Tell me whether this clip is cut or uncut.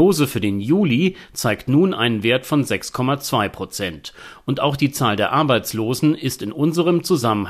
uncut